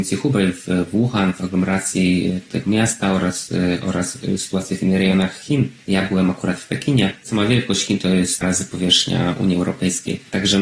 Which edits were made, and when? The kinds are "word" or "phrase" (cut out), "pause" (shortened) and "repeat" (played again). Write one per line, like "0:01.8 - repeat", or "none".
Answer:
0:08.4 - phrase